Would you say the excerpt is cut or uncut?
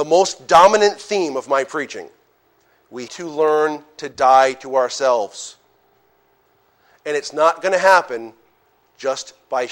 cut